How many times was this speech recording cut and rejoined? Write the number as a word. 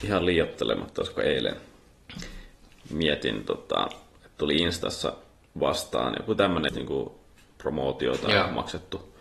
one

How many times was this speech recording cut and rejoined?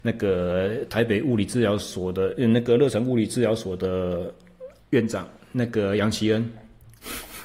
one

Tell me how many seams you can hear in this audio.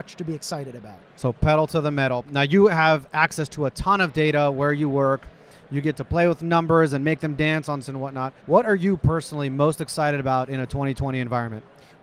three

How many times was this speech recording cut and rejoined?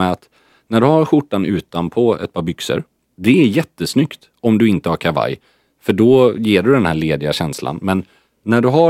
zero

